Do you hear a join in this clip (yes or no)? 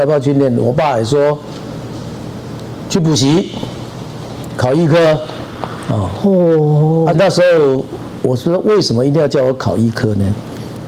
yes